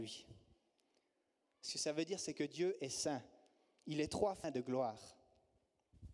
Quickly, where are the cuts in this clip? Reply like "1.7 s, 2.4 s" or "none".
none